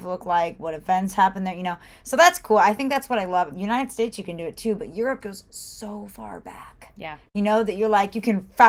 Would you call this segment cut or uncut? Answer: cut